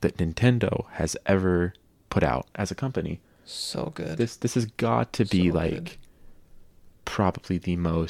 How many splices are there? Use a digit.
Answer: 0